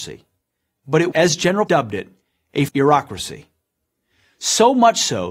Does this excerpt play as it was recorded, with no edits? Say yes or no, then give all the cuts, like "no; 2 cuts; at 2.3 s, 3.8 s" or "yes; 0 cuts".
no; 3 cuts; at 1.1 s, 1.7 s, 2.7 s